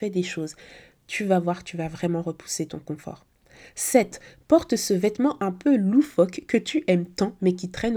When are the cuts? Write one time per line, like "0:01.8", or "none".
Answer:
none